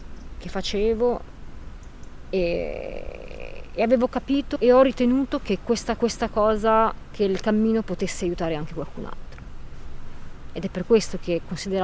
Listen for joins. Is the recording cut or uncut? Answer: cut